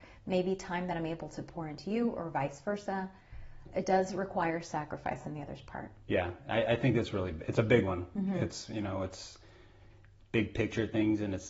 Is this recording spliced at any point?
yes; 1 cut; at 6.0 s

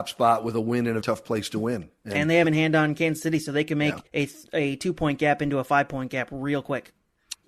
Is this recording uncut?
no; 3 cuts; at 1.0 s, 2.4 s, 4.1 s

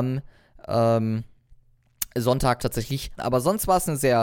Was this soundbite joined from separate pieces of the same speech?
yes; 2 cuts; at 2.6 s, 3.2 s

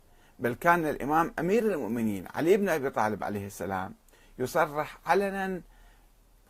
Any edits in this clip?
no; 0 cuts

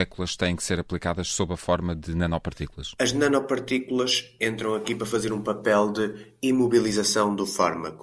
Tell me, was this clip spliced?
no; 0 cuts

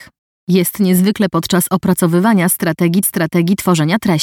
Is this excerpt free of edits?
no; 2 cuts; at 1.3 s, 3.0 s

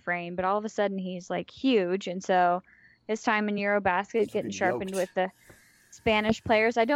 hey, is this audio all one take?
yes; 0 cuts

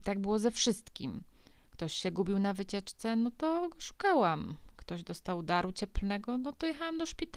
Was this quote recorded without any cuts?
yes; 0 cuts

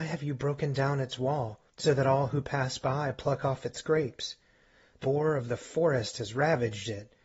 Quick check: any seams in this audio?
yes; 2 cuts; at 1.7 s, 5.0 s

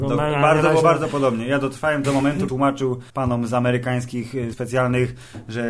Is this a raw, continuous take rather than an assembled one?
no; 4 cuts; at 2.0 s, 2.5 s, 3.1 s, 4.5 s

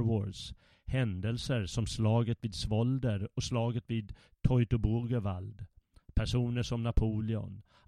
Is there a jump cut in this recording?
no; 0 cuts

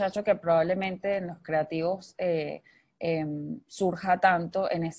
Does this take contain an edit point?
no; 0 cuts

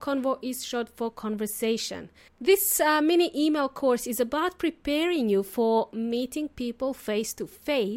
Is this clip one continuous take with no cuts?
no; 1 cut; at 2.3 s

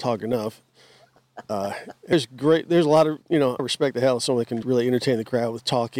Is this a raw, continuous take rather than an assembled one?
no; 4 cuts; at 2.1 s, 3.2 s, 3.6 s, 4.6 s

